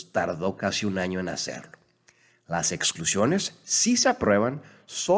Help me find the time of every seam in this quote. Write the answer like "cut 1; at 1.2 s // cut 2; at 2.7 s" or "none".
none